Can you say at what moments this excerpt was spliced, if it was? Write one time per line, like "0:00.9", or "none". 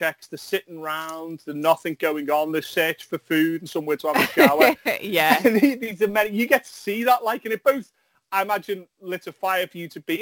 none